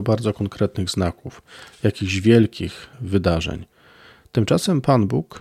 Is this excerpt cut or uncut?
cut